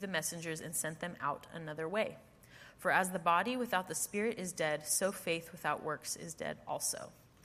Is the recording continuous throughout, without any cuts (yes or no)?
yes